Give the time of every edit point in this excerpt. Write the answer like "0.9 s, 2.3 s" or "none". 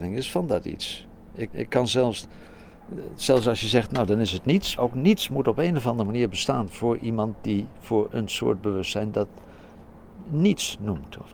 1.5 s, 4.8 s, 8.1 s